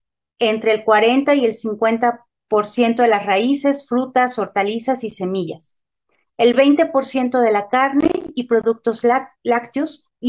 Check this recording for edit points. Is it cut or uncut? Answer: uncut